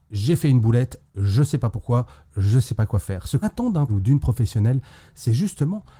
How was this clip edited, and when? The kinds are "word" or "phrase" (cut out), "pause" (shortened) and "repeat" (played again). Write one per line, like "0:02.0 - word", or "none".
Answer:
0:03.4 - word
0:03.9 - word